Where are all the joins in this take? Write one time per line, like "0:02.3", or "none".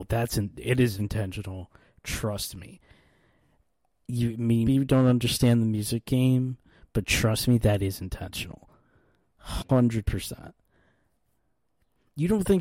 0:01.0
0:04.7